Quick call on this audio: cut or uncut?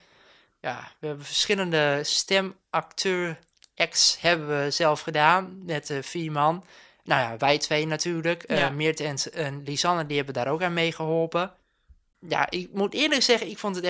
uncut